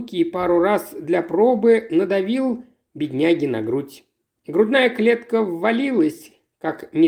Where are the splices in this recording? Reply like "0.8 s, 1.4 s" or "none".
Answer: none